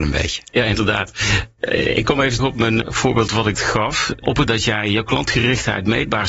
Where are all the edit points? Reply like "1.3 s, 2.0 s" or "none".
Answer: 2.4 s, 2.8 s, 3.5 s, 4.5 s